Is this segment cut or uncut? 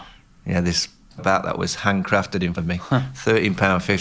cut